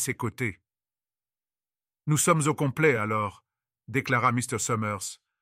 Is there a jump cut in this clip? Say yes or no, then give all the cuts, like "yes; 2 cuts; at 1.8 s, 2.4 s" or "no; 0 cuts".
no; 0 cuts